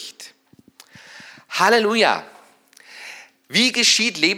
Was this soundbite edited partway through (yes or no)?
no